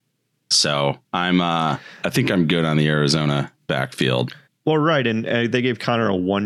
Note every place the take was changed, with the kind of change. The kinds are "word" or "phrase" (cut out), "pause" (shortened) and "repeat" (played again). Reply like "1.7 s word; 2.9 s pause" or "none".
1.0 s pause; 4.4 s pause